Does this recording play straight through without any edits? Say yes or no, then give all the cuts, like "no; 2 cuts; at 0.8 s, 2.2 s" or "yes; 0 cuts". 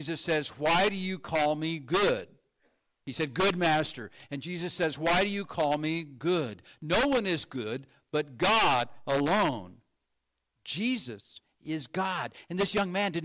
yes; 0 cuts